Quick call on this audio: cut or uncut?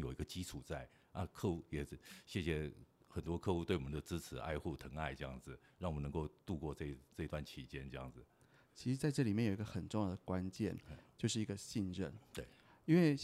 uncut